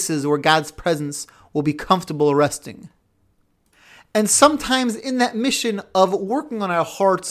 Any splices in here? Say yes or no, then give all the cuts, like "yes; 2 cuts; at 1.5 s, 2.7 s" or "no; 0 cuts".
no; 0 cuts